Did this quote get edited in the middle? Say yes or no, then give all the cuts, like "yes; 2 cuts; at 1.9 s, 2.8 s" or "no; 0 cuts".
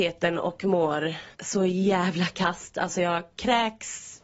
yes; 1 cut; at 1.3 s